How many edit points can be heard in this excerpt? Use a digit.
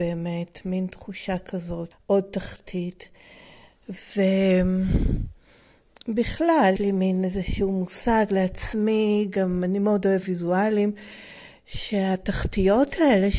3